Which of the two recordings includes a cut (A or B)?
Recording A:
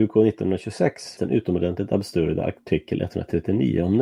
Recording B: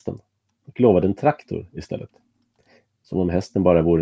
A